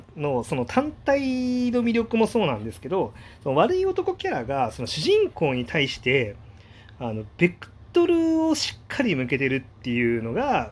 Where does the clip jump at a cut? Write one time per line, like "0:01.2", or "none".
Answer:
0:09.7